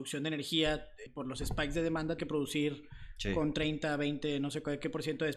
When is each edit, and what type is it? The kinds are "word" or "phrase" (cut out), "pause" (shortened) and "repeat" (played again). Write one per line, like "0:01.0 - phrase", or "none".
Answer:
0:01.1 - word
0:02.2 - word